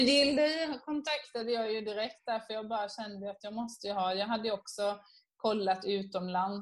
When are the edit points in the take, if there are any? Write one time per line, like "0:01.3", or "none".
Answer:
none